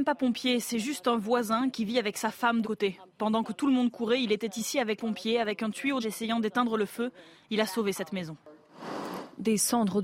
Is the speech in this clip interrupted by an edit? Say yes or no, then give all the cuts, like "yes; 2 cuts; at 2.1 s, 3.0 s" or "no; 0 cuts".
yes; 3 cuts; at 2.6 s, 5.0 s, 6.0 s